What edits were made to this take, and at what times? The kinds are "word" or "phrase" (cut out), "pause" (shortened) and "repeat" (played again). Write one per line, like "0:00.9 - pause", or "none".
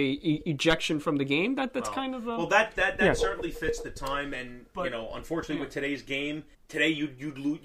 0:06.5 - pause